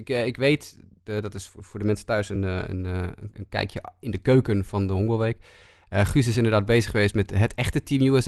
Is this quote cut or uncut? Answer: uncut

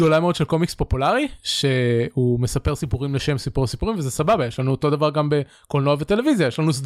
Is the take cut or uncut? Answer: uncut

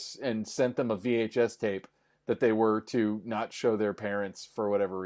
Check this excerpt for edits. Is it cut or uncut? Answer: uncut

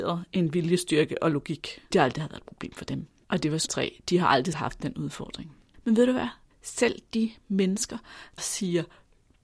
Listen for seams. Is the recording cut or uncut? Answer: cut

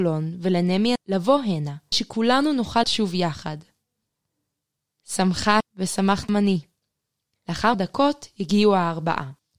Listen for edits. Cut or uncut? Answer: cut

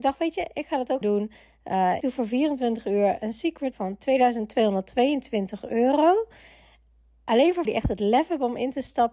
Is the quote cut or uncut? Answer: cut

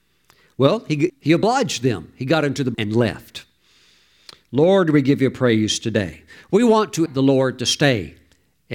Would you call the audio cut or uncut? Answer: cut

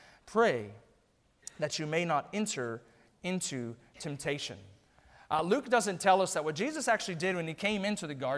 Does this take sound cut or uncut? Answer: uncut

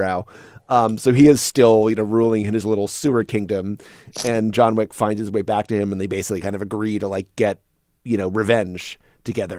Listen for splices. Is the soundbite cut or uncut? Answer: uncut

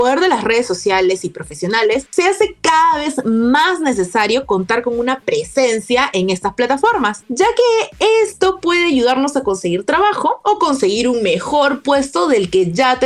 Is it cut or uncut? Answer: uncut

